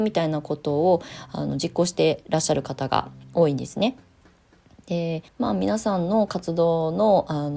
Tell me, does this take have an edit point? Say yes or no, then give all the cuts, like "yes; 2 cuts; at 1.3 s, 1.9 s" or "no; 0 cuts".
yes; 1 cut; at 5.3 s